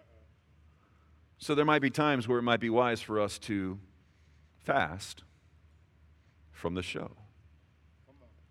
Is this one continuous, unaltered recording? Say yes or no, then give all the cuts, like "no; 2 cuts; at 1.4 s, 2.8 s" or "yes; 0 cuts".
yes; 0 cuts